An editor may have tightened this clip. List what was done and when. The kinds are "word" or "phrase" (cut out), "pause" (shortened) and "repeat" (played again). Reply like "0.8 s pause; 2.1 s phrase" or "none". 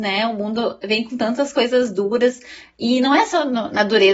none